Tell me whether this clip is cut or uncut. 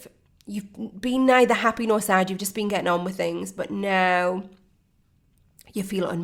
uncut